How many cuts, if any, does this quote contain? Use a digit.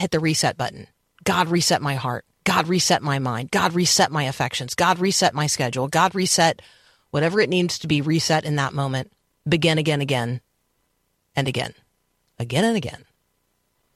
0